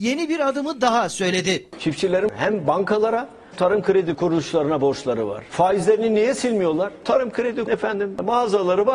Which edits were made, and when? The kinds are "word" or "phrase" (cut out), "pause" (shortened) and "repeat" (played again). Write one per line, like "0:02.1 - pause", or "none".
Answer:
0:03.5 - word
0:07.7 - word